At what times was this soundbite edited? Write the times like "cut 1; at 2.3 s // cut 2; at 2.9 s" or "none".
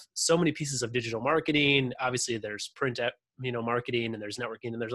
none